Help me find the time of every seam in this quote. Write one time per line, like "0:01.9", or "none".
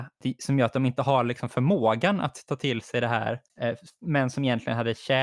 none